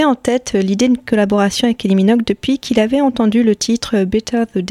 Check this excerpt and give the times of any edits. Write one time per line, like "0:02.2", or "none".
none